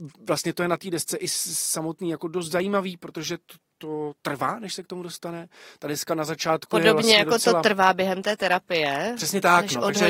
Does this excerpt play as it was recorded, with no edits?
yes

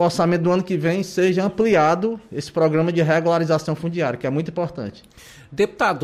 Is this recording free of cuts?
yes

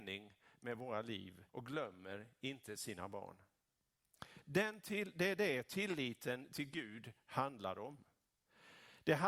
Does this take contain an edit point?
yes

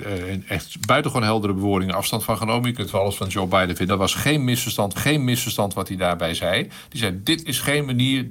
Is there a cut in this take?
yes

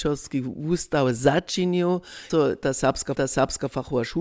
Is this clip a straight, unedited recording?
no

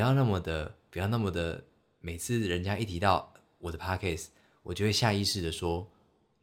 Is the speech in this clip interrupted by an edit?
no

